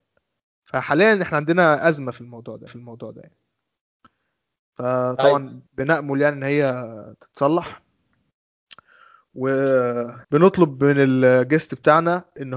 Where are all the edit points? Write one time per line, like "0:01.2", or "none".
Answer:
0:02.7
0:05.7
0:10.2